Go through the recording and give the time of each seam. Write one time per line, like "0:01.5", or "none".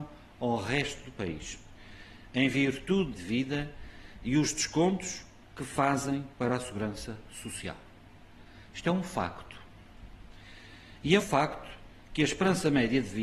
0:03.1
0:11.2